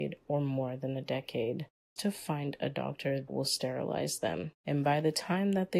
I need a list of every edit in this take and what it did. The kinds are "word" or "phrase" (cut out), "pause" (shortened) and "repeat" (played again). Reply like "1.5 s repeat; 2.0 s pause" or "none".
2.0 s word; 3.3 s word; 4.6 s pause